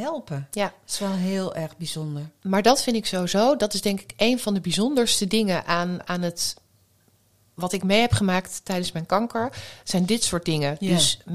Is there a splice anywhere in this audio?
yes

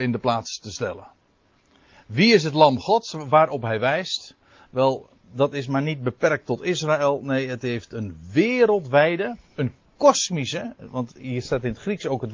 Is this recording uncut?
yes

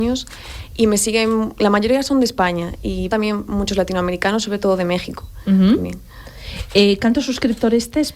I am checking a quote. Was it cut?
yes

